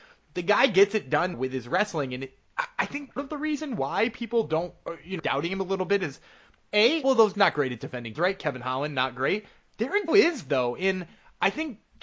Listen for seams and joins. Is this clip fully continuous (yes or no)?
no